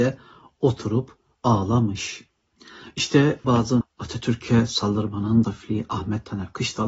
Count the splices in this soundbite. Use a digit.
3